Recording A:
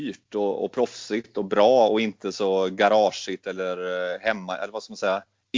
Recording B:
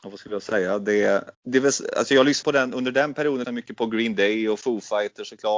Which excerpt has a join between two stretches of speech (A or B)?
B